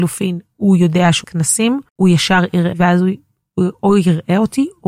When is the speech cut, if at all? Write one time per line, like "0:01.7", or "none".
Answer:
0:01.2
0:01.9
0:02.7